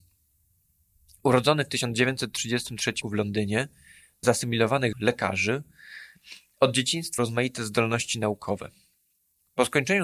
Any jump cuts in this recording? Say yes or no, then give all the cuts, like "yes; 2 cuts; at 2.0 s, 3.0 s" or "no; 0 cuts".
yes; 4 cuts; at 3.0 s, 4.2 s, 4.9 s, 7.2 s